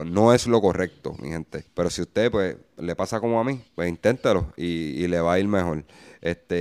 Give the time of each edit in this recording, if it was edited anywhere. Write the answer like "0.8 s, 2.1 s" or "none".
1.7 s, 3.7 s